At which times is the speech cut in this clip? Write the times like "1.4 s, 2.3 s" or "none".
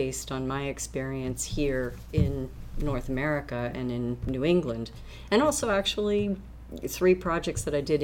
none